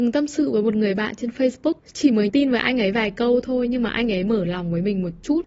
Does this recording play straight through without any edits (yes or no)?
no